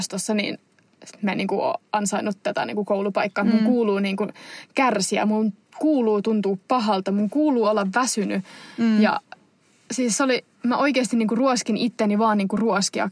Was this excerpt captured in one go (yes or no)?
yes